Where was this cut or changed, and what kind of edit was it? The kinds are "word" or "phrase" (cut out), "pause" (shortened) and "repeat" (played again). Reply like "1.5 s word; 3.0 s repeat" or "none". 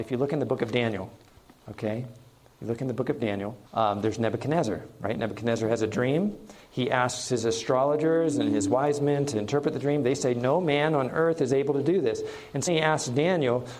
1.3 s pause; 3.7 s pause; 12.7 s word